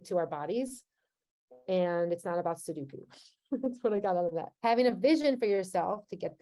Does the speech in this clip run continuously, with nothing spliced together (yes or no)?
no